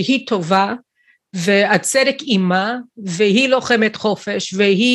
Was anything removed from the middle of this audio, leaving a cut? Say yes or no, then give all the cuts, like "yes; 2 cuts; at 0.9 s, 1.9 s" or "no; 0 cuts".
no; 0 cuts